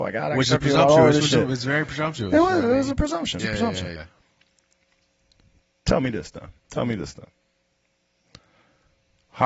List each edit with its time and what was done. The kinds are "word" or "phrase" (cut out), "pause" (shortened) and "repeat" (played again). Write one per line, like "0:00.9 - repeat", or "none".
0:03.4 - phrase
0:04.0 - word
0:06.6 - pause